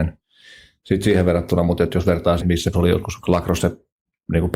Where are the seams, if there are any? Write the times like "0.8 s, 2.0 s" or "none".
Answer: 2.4 s, 2.7 s, 3.2 s